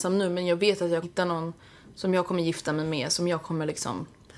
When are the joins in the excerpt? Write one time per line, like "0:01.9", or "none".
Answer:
0:01.0

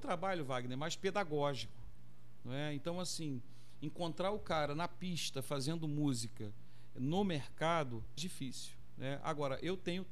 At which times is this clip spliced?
0:08.2

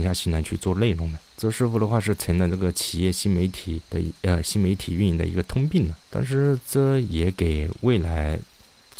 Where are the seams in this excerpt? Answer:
0:01.3
0:03.8
0:06.0

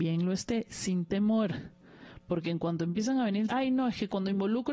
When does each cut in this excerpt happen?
0:03.5

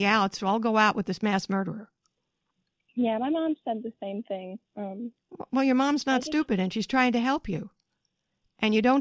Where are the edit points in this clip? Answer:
0:02.5
0:04.7

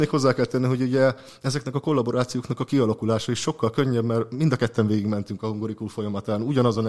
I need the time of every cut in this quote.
none

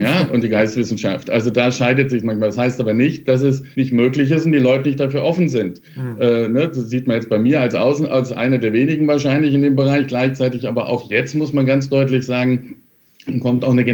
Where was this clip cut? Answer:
0:03.7
0:05.8

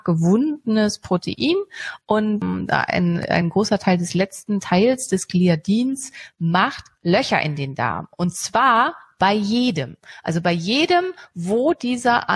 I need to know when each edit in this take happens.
none

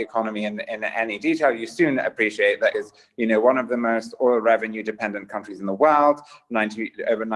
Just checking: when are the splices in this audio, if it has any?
0:02.7

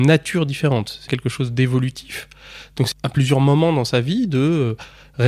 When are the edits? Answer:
0:01.1
0:02.9

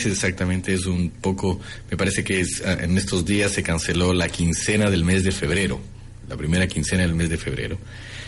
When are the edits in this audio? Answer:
none

